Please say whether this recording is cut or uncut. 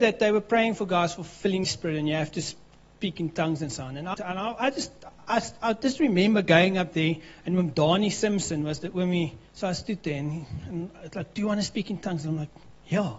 cut